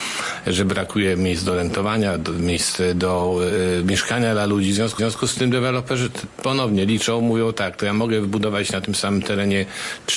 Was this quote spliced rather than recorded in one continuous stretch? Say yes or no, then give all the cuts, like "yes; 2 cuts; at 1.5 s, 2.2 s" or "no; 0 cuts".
yes; 1 cut; at 5.0 s